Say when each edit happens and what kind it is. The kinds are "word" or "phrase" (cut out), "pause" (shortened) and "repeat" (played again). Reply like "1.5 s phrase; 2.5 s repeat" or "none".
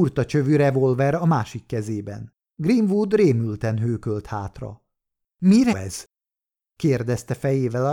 2.4 s pause; 5.7 s word

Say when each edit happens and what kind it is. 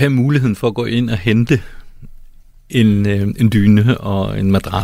none

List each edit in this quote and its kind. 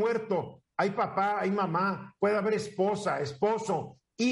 none

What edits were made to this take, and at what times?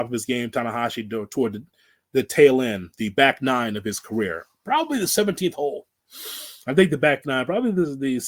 none

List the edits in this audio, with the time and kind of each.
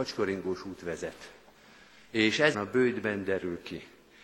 2.5 s phrase

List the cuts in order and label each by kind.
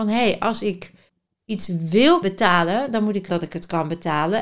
1.1 s pause; 2.2 s word; 3.3 s word

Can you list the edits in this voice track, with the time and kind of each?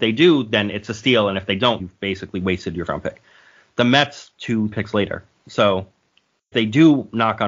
1.8 s word; 2.9 s word; 4.4 s word; 4.7 s word; 6.5 s word

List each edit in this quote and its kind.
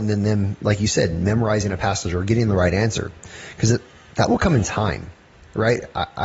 none

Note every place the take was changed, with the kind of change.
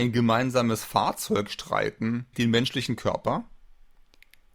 2.3 s word

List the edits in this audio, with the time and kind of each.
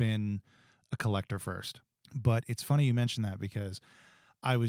none

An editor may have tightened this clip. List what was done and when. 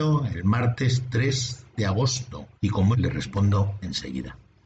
2.6 s pause; 2.9 s phrase

